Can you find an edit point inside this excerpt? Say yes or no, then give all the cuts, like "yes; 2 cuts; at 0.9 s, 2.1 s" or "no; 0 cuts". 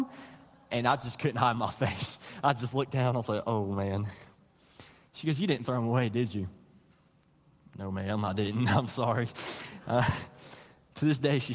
no; 0 cuts